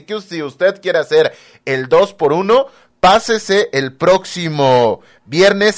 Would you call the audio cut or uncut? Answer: uncut